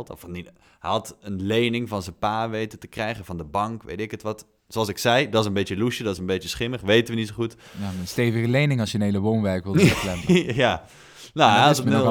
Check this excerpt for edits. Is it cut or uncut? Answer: uncut